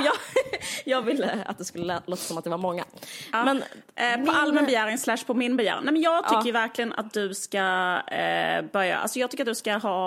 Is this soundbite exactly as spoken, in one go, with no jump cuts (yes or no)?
yes